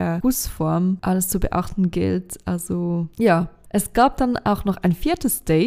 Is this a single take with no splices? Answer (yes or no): no